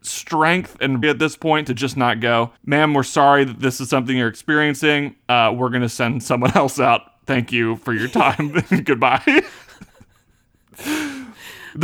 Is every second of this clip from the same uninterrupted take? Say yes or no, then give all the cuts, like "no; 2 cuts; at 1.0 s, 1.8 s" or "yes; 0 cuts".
no; 2 cuts; at 1.0 s, 2.6 s